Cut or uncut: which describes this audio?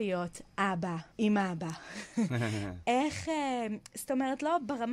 cut